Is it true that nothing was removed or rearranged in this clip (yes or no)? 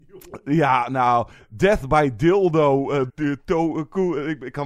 no